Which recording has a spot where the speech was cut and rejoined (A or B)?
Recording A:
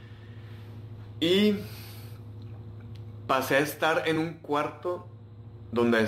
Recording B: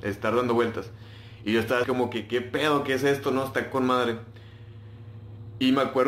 B